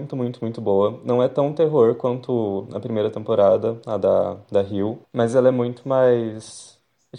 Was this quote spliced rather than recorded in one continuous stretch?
no; 0 cuts

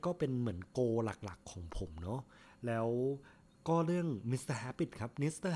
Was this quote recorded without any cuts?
yes; 0 cuts

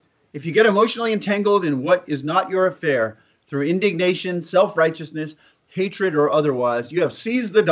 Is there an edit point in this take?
no; 0 cuts

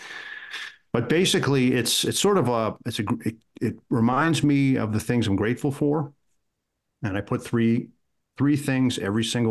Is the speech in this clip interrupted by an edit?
no; 0 cuts

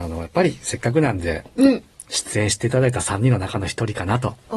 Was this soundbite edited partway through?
no; 0 cuts

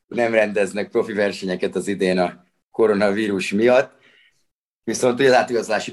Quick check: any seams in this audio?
no; 0 cuts

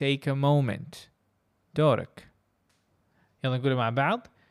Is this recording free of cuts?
yes; 0 cuts

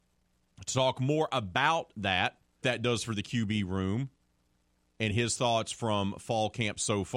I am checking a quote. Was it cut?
yes; 1 cut; at 2.6 s

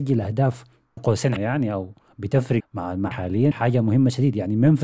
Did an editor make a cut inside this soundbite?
yes; 5 cuts; at 1.0 s, 1.4 s, 2.6 s, 3.1 s, 3.5 s

